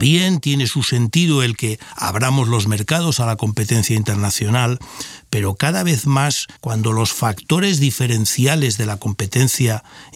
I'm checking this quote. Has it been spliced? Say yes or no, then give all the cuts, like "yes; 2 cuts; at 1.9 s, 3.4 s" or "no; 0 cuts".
yes; 1 cut; at 6.6 s